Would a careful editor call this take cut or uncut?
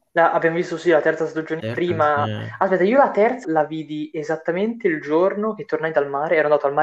cut